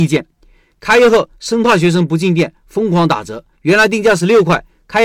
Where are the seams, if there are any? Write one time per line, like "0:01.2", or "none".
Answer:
0:03.5